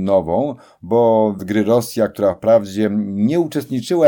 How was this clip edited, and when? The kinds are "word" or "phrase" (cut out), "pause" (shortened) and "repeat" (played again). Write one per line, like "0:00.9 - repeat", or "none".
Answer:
0:01.4 - word